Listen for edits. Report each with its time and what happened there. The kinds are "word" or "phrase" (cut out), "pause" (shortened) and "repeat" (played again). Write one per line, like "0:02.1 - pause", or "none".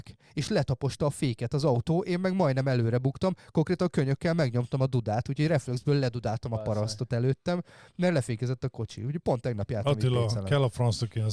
none